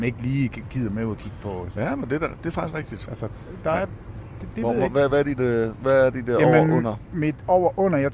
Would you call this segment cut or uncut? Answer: uncut